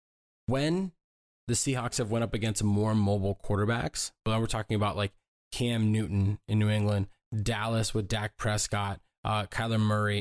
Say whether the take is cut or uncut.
uncut